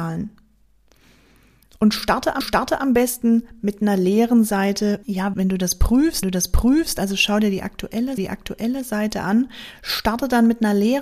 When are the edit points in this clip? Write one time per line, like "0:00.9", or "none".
0:02.4
0:05.0
0:05.3
0:06.2
0:08.2